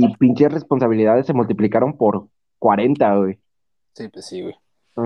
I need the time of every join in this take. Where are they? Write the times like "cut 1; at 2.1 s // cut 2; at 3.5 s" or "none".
none